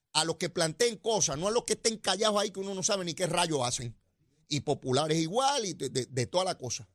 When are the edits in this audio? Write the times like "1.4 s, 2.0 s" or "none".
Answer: none